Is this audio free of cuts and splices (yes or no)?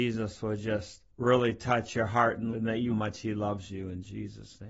no